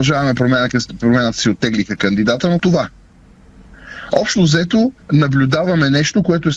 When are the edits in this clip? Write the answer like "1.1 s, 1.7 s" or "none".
2.6 s, 5.0 s